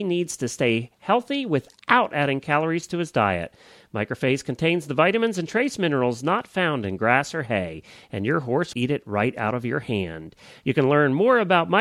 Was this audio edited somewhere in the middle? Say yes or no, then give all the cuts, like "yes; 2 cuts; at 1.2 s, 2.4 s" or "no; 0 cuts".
yes; 1 cut; at 8.7 s